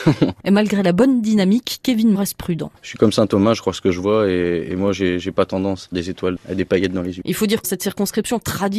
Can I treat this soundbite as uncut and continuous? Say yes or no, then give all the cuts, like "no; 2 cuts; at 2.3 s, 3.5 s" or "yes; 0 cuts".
no; 3 cuts; at 2.1 s, 5.9 s, 7.6 s